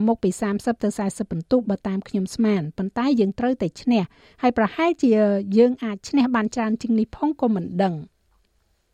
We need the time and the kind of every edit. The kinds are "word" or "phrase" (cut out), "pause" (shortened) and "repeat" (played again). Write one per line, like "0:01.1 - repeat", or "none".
none